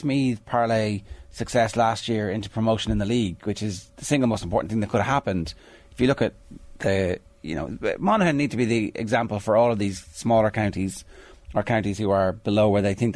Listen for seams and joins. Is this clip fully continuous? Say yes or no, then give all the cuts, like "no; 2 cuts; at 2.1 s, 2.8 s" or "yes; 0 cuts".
yes; 0 cuts